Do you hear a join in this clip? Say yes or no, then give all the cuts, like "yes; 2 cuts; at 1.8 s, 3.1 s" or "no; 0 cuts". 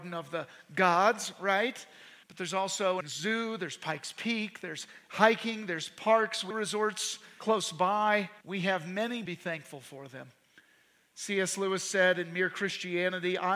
yes; 5 cuts; at 2.2 s, 3.0 s, 6.5 s, 8.4 s, 9.3 s